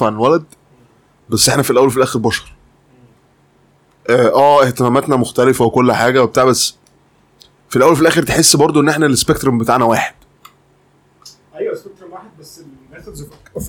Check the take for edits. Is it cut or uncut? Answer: uncut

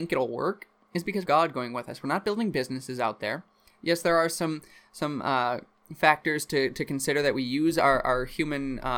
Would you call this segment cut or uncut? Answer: cut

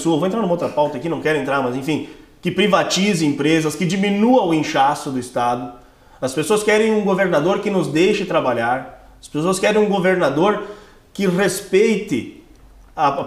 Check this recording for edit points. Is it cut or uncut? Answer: uncut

